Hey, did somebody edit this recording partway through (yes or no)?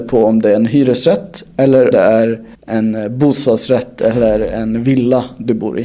yes